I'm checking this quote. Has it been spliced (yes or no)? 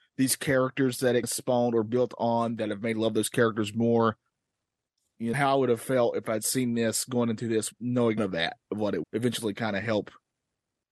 yes